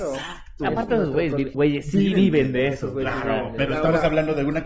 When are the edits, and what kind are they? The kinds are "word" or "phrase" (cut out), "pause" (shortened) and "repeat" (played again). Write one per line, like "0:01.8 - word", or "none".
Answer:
0:01.5 - word

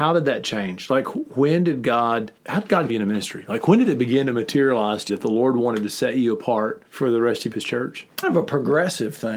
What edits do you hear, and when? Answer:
0:02.4 - pause
0:02.9 - word
0:05.1 - word
0:06.9 - pause
0:07.5 - phrase
0:08.2 - phrase

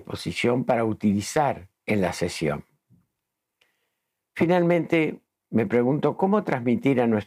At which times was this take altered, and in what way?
0:01.8 - pause

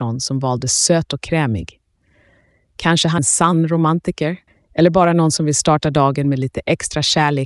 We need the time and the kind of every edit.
0:03.2 - word
0:04.5 - pause

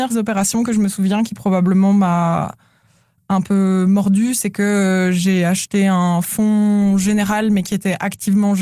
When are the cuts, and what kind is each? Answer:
none

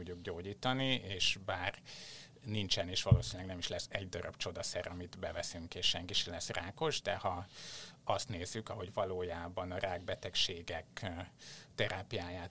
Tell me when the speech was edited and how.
none

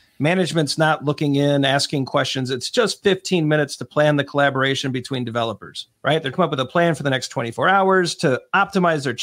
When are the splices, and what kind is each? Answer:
0:06.0 - pause
0:06.3 - phrase

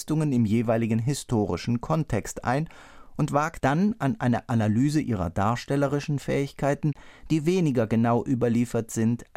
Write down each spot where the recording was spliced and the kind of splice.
0:03.6 - word

